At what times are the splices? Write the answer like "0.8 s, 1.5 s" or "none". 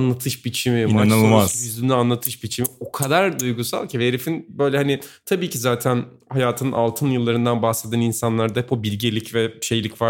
none